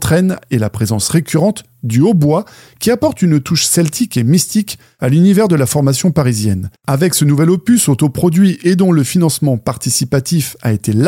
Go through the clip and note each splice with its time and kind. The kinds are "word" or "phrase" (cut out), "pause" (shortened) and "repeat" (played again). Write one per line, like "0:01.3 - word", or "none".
0:06.8 - pause